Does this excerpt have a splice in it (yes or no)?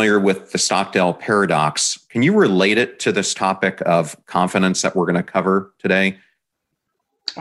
no